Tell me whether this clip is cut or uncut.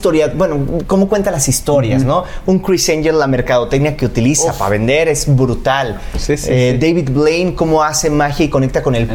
uncut